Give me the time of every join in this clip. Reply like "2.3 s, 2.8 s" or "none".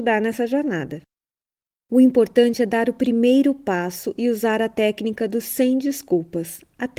none